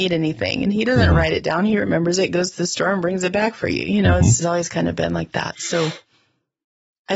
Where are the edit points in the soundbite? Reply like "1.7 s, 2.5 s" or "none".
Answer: 4.4 s